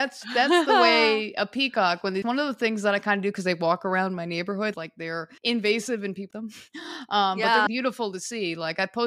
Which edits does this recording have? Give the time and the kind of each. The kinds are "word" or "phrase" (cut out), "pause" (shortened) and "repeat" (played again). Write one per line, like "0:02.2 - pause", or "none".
0:02.2 - phrase
0:04.7 - phrase
0:05.4 - pause
0:06.3 - word
0:07.7 - word

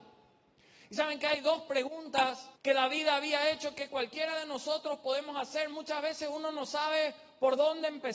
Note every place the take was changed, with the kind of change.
0:02.6 - pause

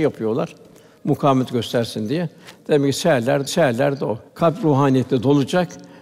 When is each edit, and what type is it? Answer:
0:03.5 - repeat
0:04.3 - pause

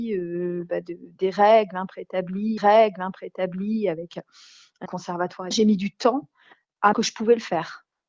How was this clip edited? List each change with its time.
0:02.6 - repeat
0:04.8 - word
0:05.5 - word
0:06.9 - phrase

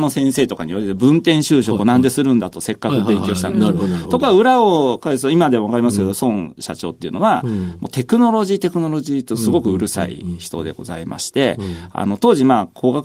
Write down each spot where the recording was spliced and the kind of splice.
none

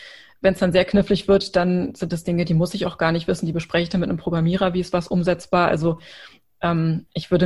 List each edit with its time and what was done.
none

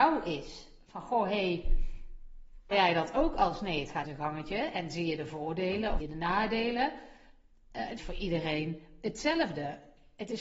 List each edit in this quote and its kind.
0:02.7 - word
0:04.0 - phrase
0:06.0 - word
0:08.0 - phrase

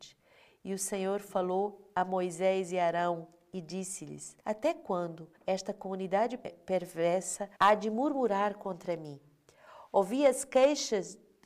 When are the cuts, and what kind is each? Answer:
0:04.4 - pause
0:05.4 - pause
0:07.5 - pause

